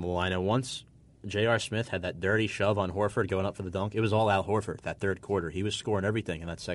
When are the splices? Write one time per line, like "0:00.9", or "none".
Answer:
none